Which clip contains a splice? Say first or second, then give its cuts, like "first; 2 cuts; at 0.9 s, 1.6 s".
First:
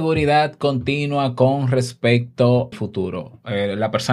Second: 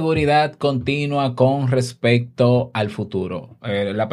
first; 1 cut; at 2.7 s